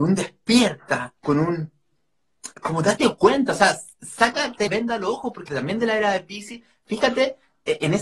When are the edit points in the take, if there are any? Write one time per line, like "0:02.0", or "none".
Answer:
0:01.2
0:02.5
0:04.7
0:05.5

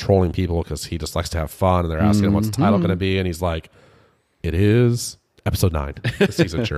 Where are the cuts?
none

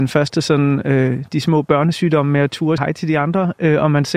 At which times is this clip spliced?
0:02.8

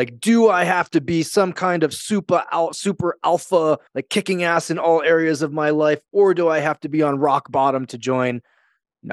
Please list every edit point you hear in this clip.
0:03.9

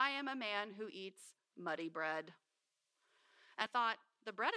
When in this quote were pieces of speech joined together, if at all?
0:03.7

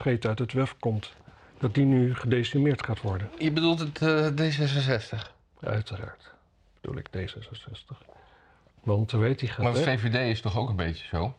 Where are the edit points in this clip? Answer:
none

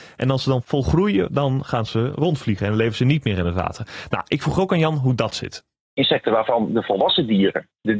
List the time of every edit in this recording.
none

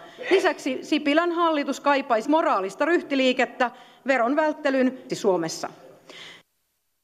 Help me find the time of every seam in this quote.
0:02.2
0:05.1

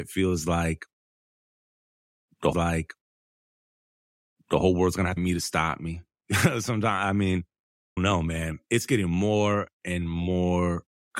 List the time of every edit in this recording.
0:02.5
0:05.2
0:08.0
0:09.7

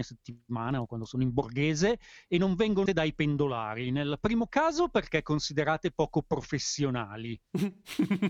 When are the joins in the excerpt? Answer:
0:02.9

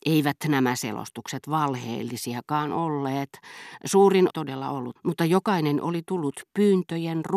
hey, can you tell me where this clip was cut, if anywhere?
0:04.3
0:05.0

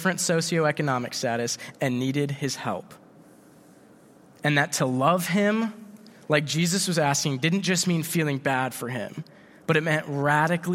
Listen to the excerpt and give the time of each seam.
none

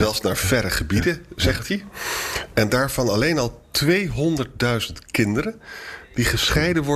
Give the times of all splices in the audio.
none

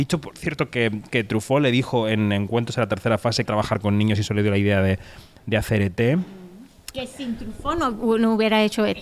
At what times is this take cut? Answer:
0:03.5

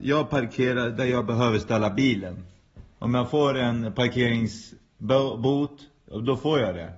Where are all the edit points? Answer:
none

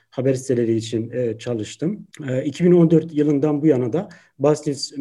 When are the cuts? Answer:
0:02.1

